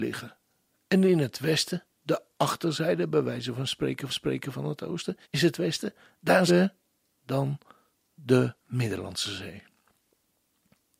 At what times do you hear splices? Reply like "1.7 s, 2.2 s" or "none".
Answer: 1.9 s, 4.1 s, 5.2 s, 6.5 s, 8.6 s